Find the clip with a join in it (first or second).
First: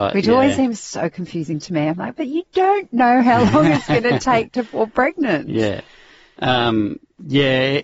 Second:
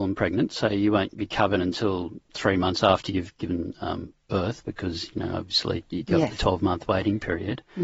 second